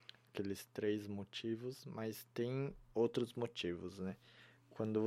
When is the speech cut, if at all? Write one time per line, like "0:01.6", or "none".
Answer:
none